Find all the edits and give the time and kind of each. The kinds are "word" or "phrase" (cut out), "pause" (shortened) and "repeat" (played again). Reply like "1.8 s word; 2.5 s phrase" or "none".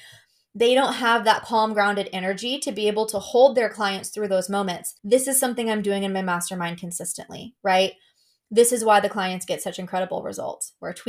5.0 s pause; 7.6 s pause